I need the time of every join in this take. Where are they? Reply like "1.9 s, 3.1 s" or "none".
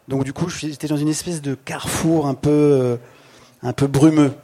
none